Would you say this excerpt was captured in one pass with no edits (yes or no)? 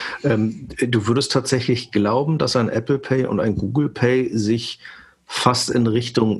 yes